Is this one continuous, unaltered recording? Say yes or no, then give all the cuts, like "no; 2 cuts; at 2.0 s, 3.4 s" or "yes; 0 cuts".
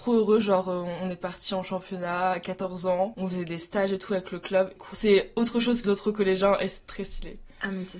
no; 2 cuts; at 4.9 s, 5.8 s